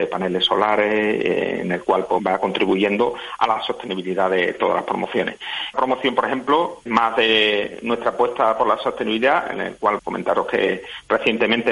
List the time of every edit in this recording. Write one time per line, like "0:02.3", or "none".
0:02.2
0:05.7
0:06.9
0:10.0

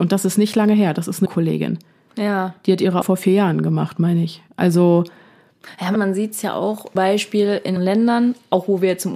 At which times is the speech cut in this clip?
0:01.3
0:03.0
0:06.0
0:07.0
0:07.8

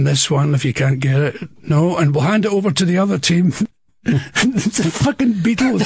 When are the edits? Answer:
none

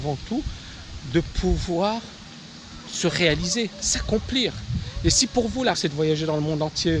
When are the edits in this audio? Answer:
0:05.7

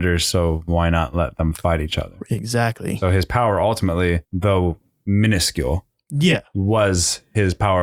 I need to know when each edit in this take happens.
0:04.2

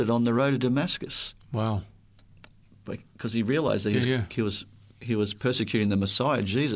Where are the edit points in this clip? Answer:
none

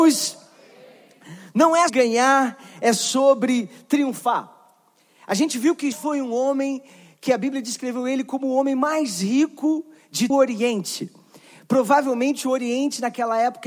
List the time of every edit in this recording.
0:01.9
0:05.9
0:10.3

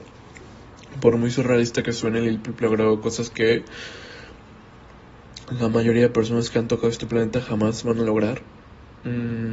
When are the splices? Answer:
none

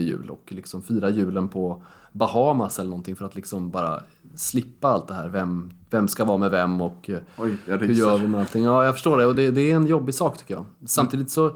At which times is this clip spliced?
none

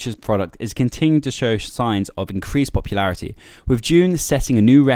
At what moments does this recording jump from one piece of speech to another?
none

